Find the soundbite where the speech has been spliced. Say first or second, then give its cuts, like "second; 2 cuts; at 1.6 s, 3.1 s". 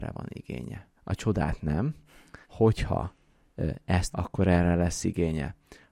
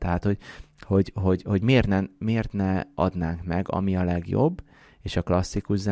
first; 3 cuts; at 1.0 s, 2.4 s, 4.1 s